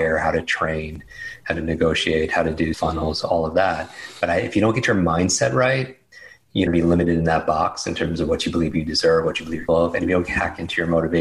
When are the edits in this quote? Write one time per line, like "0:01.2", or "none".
0:02.7
0:06.7
0:09.7